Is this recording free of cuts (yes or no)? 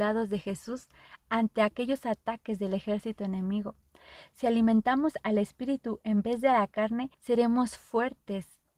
no